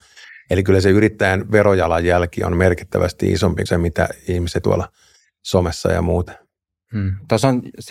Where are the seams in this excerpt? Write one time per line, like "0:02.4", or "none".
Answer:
0:03.7
0:04.6